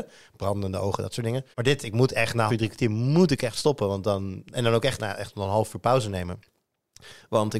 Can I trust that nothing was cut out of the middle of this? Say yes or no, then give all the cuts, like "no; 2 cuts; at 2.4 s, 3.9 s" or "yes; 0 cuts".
no; 3 cuts; at 1.5 s, 2.5 s, 5.0 s